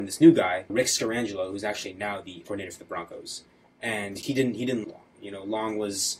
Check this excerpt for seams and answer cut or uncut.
cut